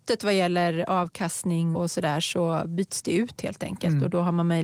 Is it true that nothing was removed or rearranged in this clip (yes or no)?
no